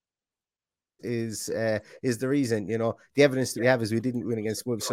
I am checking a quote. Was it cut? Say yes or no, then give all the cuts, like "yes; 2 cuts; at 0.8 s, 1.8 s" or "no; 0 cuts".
no; 0 cuts